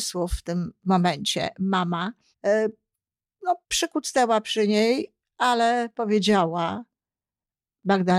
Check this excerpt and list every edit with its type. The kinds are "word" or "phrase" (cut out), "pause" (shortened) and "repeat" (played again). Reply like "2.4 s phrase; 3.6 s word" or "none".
2.3 s pause; 3.6 s pause